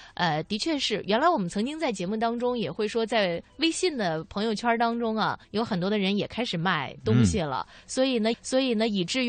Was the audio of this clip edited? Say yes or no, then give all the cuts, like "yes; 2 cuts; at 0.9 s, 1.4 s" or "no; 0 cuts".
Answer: yes; 2 cuts; at 5.4 s, 8.3 s